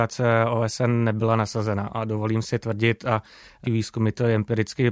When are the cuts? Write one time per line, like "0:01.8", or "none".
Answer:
0:03.6